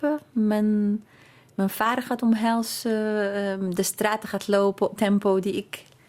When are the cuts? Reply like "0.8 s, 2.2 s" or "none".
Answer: 5.0 s